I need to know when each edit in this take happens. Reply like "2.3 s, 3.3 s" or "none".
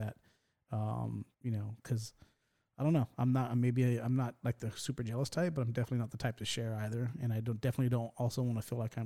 1.3 s

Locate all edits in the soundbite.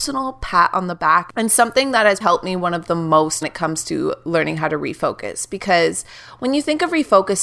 2.2 s, 3.4 s

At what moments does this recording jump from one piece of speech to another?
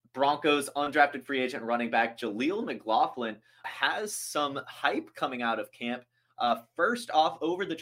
3.6 s

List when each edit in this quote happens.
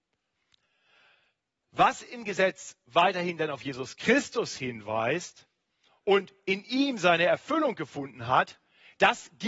5.7 s

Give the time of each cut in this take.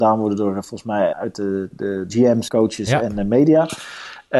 1.1 s, 1.7 s, 2.1 s, 2.5 s

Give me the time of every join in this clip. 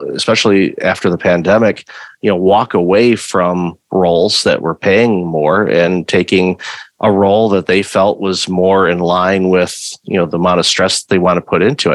none

